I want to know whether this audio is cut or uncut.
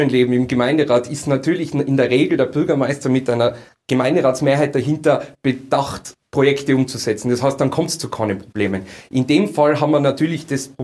uncut